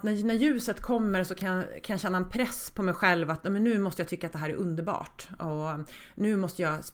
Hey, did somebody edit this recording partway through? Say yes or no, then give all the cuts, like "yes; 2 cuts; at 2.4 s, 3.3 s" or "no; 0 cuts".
no; 0 cuts